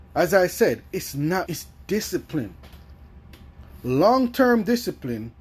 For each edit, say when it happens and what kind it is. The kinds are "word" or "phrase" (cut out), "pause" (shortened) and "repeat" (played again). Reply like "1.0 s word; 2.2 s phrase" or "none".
1.5 s word